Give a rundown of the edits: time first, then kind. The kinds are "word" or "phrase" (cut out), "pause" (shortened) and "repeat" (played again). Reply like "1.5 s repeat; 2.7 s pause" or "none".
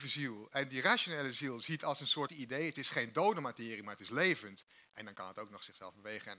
2.3 s phrase